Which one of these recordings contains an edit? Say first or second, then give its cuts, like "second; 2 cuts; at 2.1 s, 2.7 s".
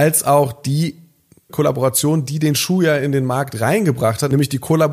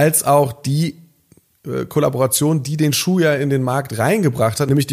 first; 1 cut; at 1.5 s